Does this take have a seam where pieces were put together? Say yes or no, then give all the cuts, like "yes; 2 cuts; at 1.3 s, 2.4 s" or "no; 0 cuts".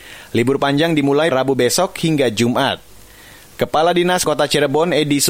yes; 2 cuts; at 1.3 s, 4.2 s